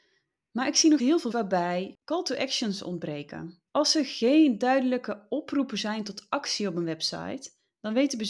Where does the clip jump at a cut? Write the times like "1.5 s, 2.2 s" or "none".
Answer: 1.0 s, 1.3 s, 3.7 s